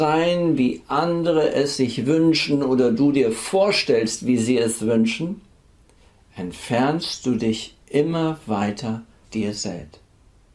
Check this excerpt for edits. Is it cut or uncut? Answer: cut